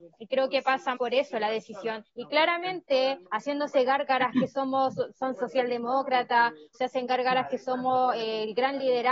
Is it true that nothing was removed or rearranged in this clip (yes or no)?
no